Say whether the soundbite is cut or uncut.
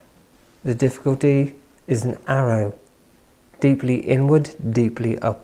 uncut